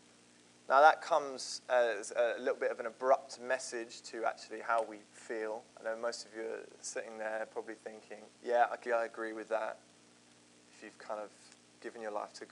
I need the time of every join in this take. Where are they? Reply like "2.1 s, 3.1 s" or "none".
5.7 s, 8.3 s, 8.9 s